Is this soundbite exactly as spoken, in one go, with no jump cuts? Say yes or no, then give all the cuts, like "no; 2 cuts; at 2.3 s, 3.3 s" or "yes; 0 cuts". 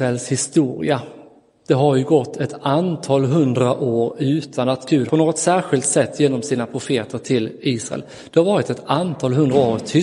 no; 1 cut; at 5.1 s